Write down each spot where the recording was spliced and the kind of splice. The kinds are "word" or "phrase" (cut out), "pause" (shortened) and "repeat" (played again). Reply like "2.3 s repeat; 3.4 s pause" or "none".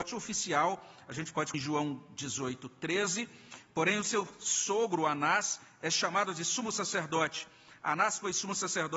1.5 s word